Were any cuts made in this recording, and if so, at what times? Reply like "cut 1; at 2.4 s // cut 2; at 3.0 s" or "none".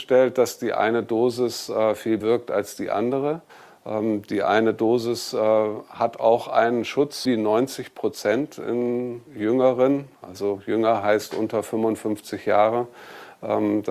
cut 1; at 2.2 s // cut 2; at 3.5 s // cut 3; at 7.2 s // cut 4; at 9.3 s